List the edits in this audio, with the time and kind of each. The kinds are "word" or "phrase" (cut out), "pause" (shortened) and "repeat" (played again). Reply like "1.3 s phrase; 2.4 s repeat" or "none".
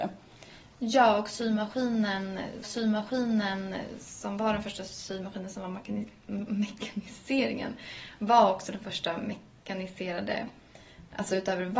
2.6 s repeat